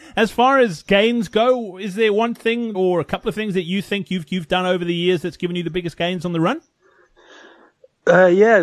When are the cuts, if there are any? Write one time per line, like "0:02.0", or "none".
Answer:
0:02.7
0:04.3